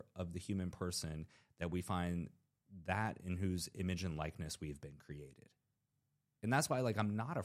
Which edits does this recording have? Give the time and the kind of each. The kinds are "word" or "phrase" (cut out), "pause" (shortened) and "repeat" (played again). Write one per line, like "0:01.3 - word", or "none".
none